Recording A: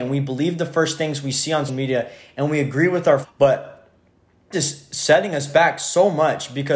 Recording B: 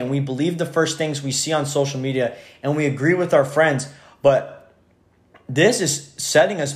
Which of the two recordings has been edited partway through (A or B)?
A